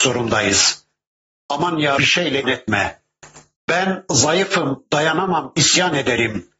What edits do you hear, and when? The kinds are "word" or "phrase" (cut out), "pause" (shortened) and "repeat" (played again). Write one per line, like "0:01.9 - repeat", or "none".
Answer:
0:02.0 - phrase
0:02.4 - word

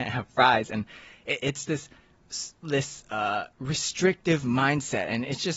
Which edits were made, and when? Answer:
0:01.7 - word
0:02.5 - pause

